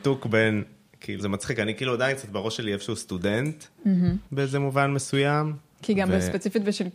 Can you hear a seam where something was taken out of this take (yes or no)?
yes